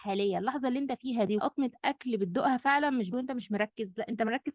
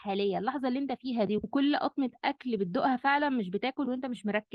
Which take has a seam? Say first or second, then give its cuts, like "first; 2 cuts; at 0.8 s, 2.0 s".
first; 2 cuts; at 1.4 s, 3.1 s